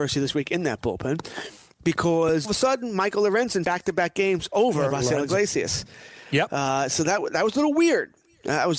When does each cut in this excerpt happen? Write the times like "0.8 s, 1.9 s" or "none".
2.4 s, 3.6 s, 4.9 s